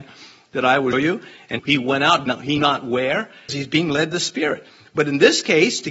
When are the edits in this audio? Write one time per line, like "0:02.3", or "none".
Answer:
0:00.9
0:01.6
0:02.3
0:02.6
0:03.5
0:04.1